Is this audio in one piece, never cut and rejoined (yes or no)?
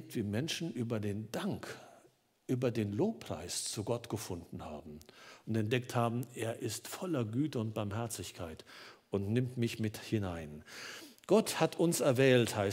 yes